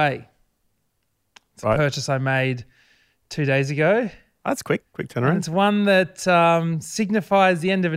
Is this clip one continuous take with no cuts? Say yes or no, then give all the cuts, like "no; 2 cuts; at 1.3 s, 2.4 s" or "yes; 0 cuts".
no; 1 cut; at 4.9 s